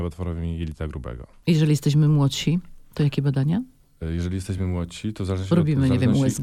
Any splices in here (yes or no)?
no